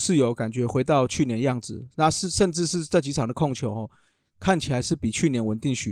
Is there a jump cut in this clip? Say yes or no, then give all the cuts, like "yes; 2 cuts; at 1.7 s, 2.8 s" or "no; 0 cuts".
no; 0 cuts